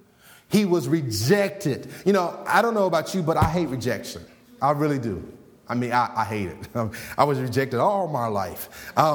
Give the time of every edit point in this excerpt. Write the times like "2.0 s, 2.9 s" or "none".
none

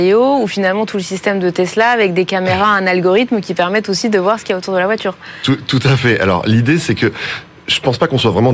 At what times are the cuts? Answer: none

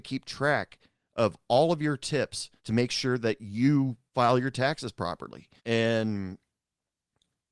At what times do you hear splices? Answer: 2.6 s, 4.1 s, 5.6 s

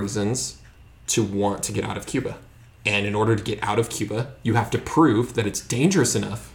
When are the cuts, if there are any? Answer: none

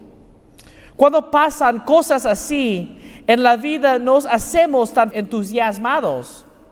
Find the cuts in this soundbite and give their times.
5.1 s

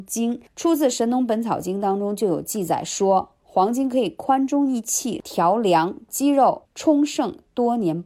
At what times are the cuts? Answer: 5.2 s

